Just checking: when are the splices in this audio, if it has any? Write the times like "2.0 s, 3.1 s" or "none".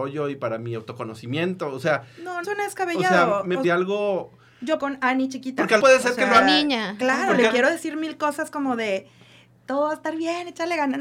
2.4 s, 3.6 s, 4.8 s, 5.8 s